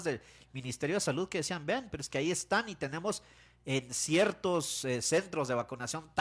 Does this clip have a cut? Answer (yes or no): no